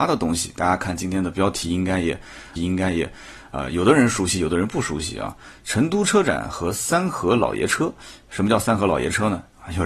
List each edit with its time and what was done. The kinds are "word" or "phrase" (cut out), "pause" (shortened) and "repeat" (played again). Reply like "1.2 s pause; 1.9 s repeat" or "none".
2.6 s repeat